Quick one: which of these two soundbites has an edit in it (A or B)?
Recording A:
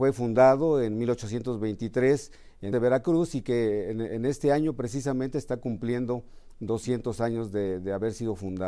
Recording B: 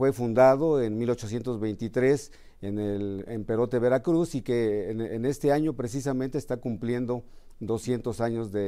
A